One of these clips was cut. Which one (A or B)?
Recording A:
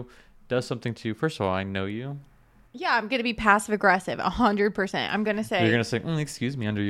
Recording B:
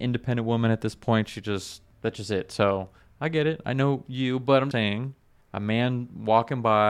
B